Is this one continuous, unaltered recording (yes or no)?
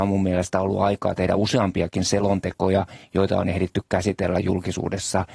yes